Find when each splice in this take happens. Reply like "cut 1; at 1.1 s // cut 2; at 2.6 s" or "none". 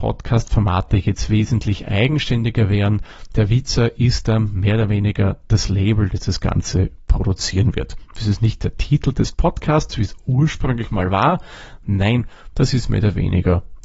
none